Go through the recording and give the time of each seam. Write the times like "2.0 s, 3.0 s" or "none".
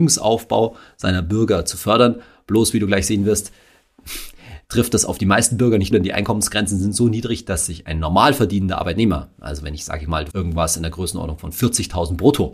5.9 s, 10.3 s